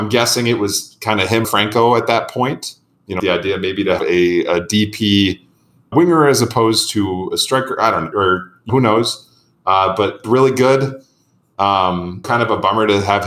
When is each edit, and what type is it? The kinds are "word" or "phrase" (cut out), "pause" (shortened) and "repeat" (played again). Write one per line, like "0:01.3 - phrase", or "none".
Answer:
0:01.4 - word
0:03.2 - word
0:04.0 - word
0:05.9 - word
0:08.1 - word
0:08.7 - word
0:10.2 - word
0:12.2 - word

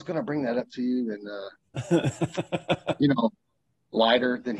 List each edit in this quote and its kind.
none

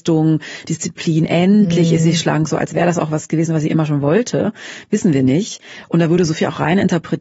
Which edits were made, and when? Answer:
none

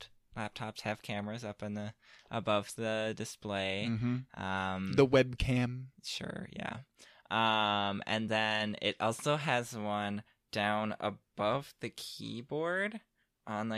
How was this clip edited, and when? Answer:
none

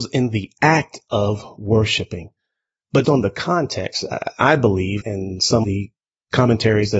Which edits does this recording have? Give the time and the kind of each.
0:03.0 - word
0:05.0 - word
0:05.6 - word

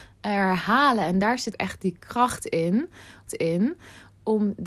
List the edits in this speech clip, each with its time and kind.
0:01.5 - word
0:03.3 - repeat

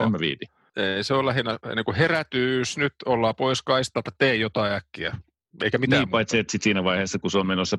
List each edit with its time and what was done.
none

